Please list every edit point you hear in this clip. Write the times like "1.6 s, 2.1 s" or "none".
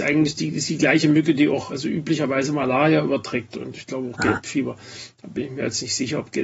1.7 s, 3.5 s